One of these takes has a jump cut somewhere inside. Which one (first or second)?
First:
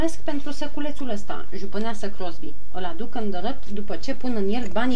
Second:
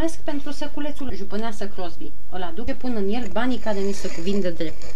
second